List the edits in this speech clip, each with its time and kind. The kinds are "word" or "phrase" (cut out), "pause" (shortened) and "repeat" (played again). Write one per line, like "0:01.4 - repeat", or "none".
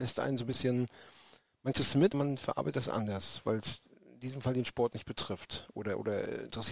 0:01.7 - word
0:02.1 - word